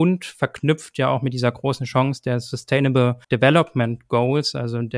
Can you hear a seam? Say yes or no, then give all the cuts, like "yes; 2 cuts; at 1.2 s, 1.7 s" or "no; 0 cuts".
yes; 1 cut; at 3.2 s